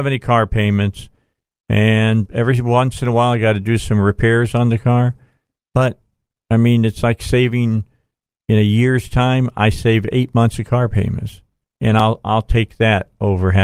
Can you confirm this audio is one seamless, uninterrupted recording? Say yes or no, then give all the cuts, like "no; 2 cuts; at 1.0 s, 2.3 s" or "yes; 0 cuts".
no; 1 cut; at 2.3 s